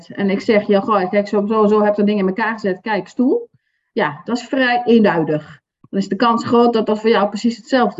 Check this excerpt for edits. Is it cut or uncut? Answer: uncut